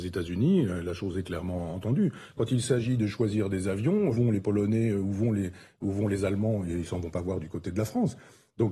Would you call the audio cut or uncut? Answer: cut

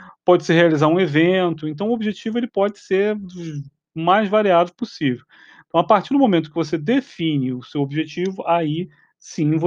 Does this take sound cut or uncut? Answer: uncut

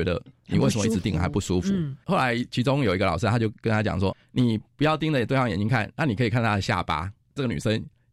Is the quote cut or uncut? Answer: cut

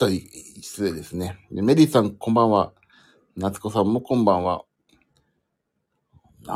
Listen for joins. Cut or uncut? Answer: uncut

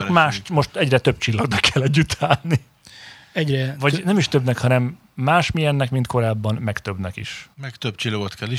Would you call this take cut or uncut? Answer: cut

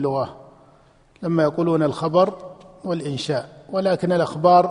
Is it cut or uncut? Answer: uncut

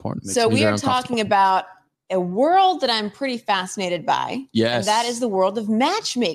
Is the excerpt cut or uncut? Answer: uncut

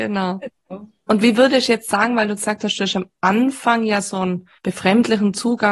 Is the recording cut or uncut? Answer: cut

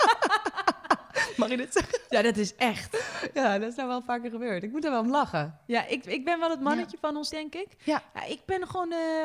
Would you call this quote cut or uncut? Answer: cut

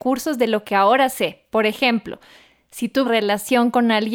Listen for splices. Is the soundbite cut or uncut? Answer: cut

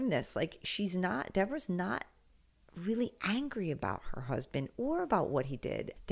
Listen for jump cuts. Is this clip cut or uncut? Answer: uncut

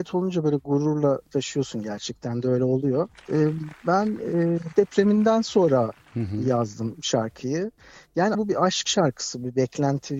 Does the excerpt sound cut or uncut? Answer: cut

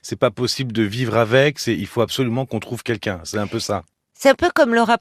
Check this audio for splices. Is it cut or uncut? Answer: uncut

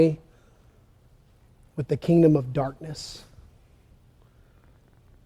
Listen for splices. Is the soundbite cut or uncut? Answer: uncut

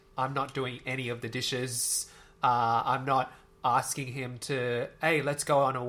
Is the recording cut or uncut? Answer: uncut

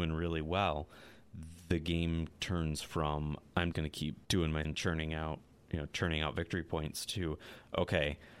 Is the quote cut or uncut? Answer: cut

